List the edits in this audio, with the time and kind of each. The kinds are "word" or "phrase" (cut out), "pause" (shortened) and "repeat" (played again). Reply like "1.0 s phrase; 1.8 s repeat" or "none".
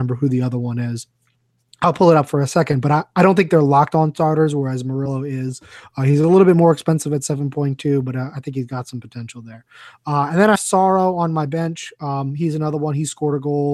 10.6 s word